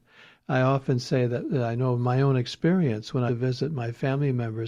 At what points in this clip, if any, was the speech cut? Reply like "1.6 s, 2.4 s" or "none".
3.3 s